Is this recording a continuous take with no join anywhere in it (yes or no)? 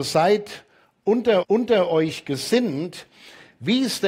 no